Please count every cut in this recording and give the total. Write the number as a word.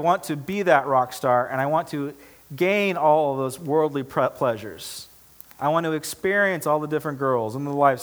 zero